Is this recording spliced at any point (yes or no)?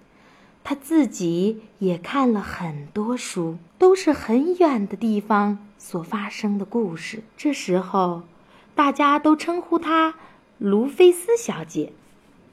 yes